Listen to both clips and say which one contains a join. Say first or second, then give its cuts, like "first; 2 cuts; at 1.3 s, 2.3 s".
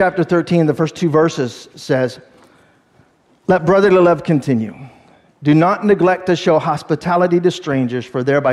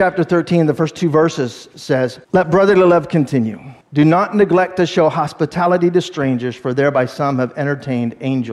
second; 2 cuts; at 2.2 s, 3.8 s